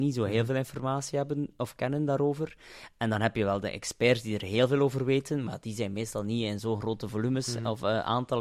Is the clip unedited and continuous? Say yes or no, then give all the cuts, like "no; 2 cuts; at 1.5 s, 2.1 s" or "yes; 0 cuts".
yes; 0 cuts